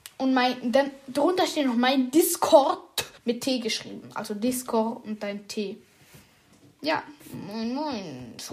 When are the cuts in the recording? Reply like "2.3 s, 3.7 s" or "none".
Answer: 3.2 s, 7.2 s